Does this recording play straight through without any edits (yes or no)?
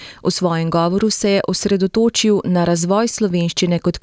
yes